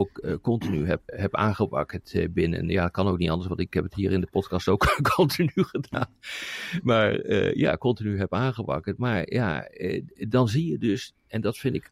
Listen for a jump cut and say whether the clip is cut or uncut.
cut